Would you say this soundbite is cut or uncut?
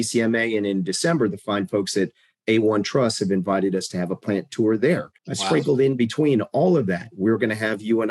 cut